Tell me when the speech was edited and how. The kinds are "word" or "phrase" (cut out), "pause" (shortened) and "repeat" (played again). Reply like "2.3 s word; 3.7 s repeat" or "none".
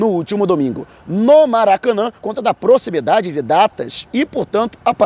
2.2 s word